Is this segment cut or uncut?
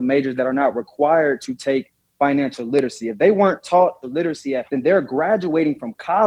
cut